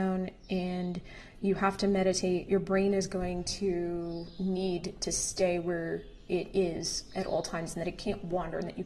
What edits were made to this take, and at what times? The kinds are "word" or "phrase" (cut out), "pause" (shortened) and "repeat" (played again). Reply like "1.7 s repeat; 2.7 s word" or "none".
2.5 s word